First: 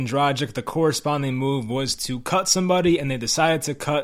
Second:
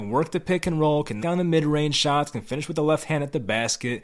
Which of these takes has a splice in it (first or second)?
second